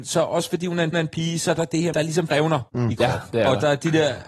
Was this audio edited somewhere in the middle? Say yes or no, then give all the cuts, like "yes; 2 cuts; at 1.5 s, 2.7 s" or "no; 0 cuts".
yes; 5 cuts; at 0.9 s, 1.9 s, 2.3 s, 2.7 s, 3.3 s